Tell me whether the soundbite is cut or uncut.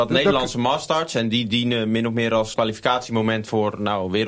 cut